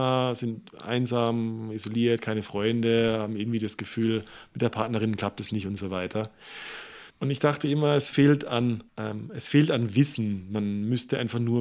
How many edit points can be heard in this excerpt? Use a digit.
2